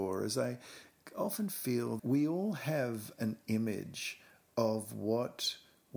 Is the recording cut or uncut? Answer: cut